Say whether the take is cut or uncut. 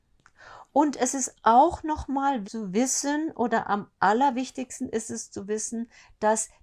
cut